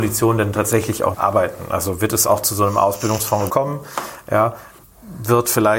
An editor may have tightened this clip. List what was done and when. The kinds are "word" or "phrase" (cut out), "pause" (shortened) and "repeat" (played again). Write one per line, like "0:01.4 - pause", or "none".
0:01.1 - word
0:03.5 - word